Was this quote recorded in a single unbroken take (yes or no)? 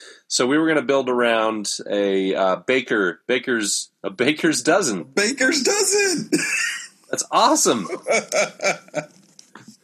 no